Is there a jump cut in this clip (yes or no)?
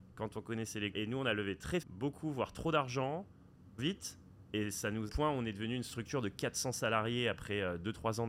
yes